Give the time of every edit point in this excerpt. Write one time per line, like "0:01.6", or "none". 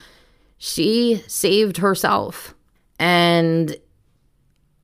0:02.7